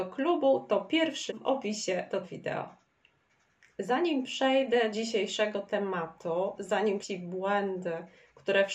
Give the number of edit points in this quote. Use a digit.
4